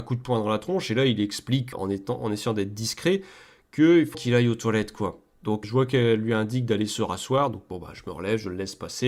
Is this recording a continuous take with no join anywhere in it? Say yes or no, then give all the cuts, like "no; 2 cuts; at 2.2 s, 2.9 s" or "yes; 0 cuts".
no; 3 cuts; at 1.7 s, 4.1 s, 5.6 s